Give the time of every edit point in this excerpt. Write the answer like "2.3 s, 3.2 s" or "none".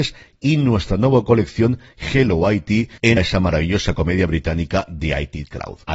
3.2 s